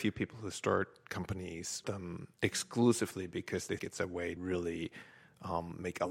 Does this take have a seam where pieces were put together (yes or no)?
yes